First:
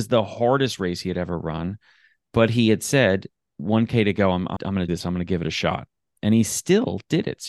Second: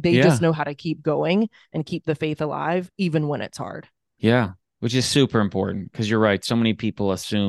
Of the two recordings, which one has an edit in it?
first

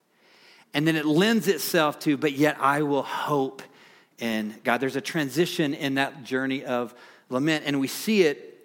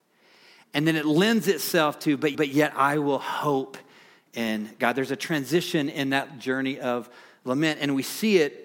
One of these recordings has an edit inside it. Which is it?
second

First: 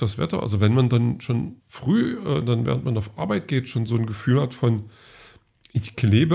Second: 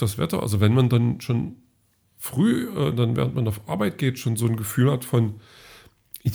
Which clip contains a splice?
first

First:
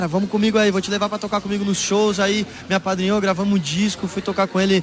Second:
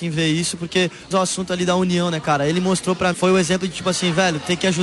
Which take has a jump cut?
second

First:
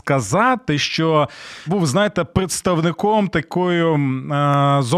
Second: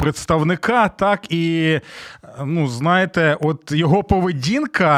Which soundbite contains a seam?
first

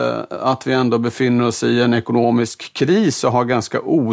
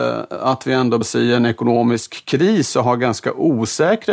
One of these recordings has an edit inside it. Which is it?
second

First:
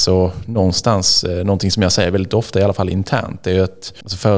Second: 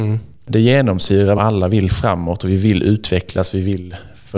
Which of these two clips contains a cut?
second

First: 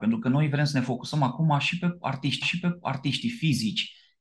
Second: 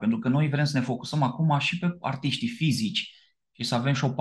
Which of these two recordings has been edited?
first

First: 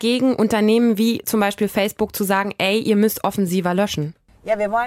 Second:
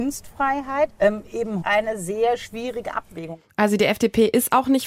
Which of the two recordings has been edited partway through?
second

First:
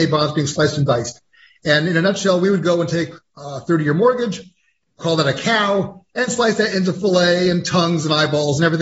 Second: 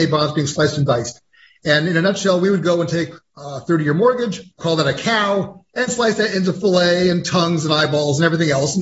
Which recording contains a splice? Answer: second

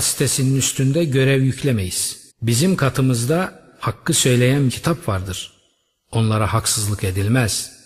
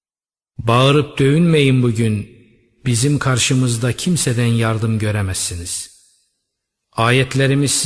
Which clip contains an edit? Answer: first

